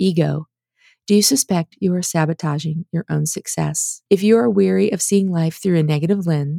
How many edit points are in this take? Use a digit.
1